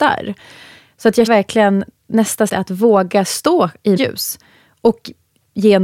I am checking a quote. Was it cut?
yes; 3 cuts; at 1.3 s, 2.5 s, 4.0 s

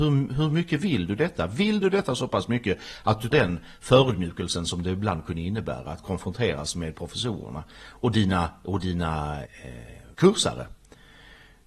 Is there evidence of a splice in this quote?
yes; 3 cuts; at 3.3 s, 9.4 s, 10.1 s

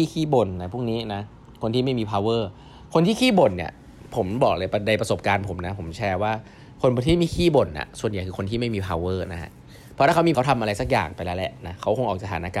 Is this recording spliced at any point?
yes; 1 cut; at 10.3 s

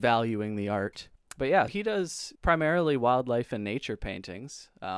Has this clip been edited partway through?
yes; 3 cuts; at 1.2 s, 1.7 s, 2.4 s

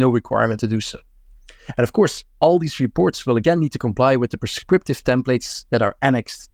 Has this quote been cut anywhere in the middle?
no; 0 cuts

